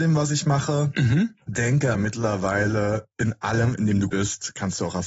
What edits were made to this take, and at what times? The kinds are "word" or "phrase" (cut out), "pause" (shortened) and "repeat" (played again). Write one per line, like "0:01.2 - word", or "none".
0:01.9 - word
0:03.1 - pause
0:04.1 - word